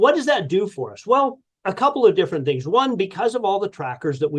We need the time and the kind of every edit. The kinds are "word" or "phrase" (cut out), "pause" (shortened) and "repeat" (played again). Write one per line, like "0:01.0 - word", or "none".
0:01.4 - pause